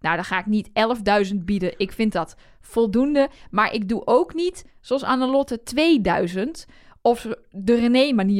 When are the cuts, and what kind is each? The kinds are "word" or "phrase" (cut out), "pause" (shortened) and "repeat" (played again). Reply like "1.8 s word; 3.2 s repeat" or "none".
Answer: none